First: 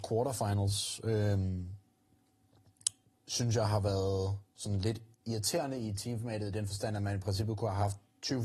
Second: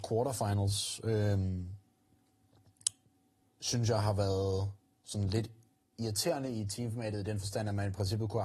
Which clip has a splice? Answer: first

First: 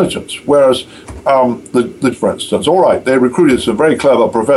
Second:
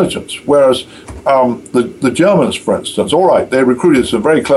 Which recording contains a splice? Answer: first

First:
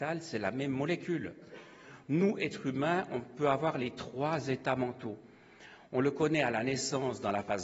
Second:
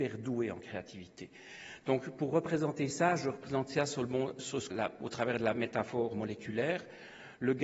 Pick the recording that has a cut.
second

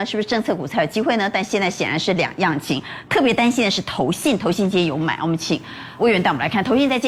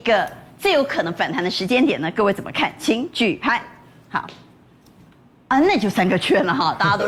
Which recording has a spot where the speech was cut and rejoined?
first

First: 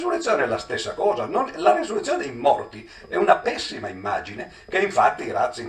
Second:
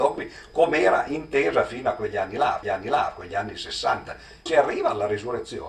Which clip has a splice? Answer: second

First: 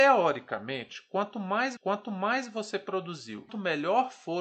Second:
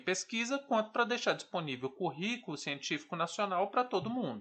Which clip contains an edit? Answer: first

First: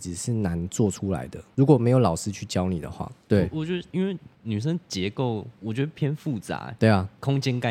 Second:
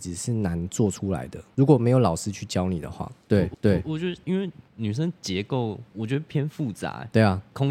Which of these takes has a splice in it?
second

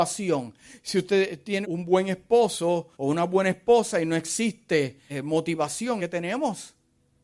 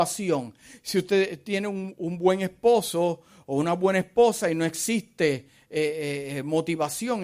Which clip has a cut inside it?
first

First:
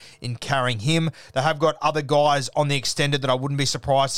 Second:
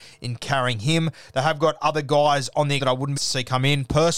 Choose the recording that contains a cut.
second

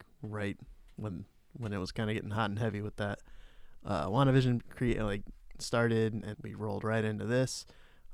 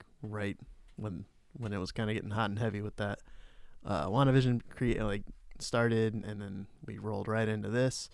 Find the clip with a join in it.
first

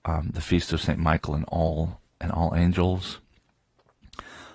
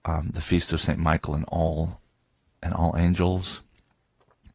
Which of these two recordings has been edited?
first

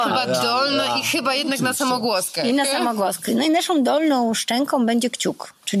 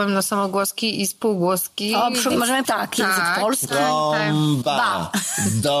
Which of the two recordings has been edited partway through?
second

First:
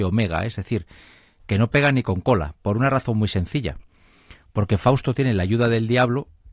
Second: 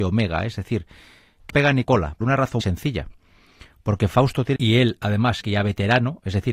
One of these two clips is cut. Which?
second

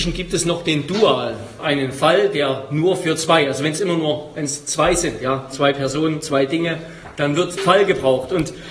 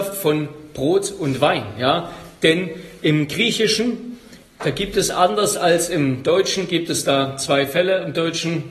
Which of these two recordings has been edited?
first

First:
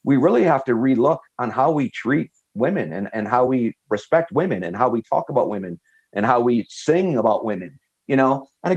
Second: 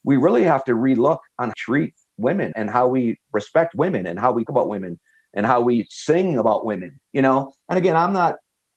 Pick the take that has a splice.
second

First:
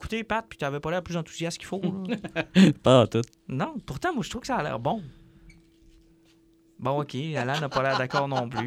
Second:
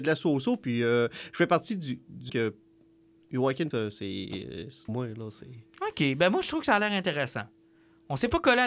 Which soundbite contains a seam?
second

